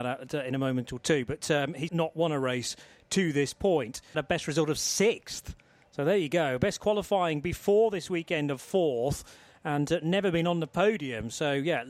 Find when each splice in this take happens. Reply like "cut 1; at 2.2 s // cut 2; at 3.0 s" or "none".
cut 1; at 1.9 s // cut 2; at 4.1 s